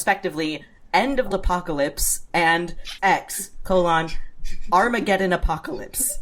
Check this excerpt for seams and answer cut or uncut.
cut